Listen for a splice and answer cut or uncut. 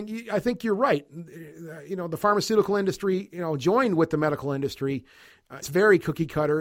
cut